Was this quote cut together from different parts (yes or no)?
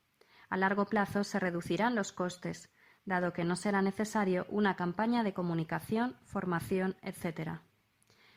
no